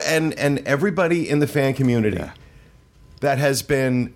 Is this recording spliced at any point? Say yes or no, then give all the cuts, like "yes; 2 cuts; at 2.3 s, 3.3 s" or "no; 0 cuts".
no; 0 cuts